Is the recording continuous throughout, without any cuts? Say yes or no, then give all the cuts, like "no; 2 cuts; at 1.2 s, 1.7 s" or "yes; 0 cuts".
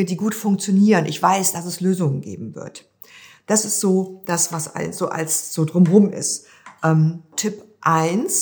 yes; 0 cuts